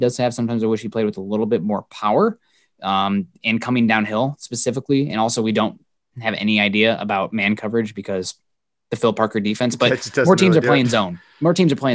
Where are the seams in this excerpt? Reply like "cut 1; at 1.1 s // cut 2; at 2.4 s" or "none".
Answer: none